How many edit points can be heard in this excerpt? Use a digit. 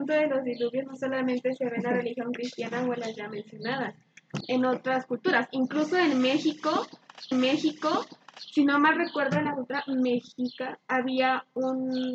2